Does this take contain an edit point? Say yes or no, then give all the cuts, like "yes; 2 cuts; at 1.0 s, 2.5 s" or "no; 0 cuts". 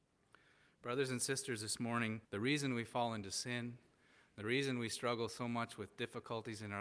yes; 1 cut; at 2.2 s